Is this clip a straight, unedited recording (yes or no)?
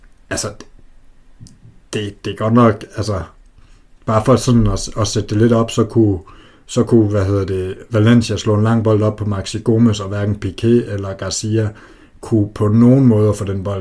yes